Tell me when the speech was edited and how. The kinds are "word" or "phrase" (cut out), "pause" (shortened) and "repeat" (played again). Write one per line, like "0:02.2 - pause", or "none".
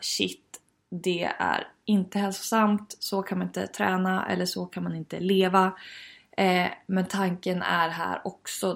none